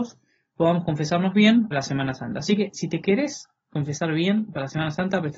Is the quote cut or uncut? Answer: cut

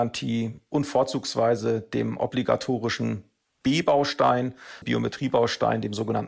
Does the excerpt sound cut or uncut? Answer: cut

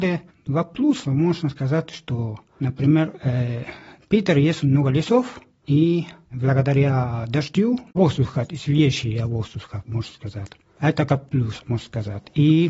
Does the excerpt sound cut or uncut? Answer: uncut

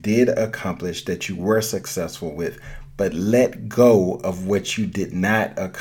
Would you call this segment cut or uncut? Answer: uncut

